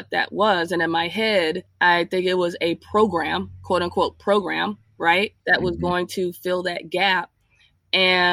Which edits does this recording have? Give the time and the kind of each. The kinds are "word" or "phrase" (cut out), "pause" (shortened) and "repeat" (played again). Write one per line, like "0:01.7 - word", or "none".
0:01.7 - pause
0:05.4 - pause